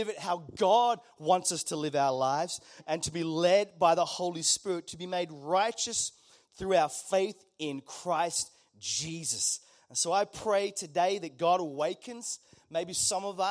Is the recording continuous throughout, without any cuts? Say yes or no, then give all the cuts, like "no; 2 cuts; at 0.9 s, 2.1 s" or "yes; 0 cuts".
yes; 0 cuts